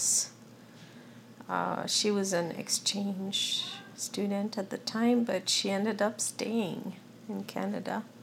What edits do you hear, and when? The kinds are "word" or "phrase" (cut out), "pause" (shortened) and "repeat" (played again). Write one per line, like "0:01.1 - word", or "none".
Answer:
none